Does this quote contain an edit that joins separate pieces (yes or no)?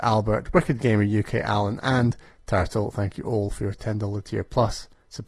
no